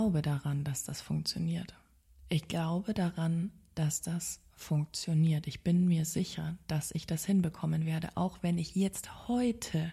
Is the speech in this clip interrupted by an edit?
no; 0 cuts

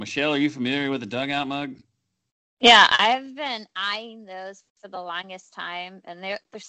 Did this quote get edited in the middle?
yes; 1 cut; at 4.7 s

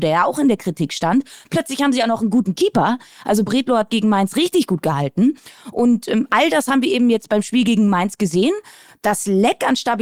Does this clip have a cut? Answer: no; 0 cuts

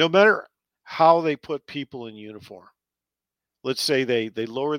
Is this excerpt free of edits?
yes; 0 cuts

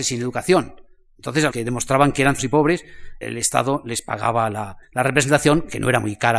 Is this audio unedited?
no; 4 cuts; at 1.5 s, 2.4 s, 3.2 s, 4.8 s

